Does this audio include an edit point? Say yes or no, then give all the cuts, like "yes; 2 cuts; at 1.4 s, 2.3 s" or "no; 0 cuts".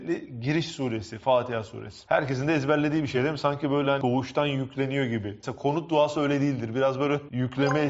no; 0 cuts